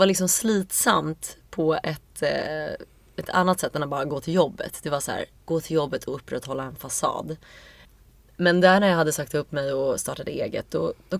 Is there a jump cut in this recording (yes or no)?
no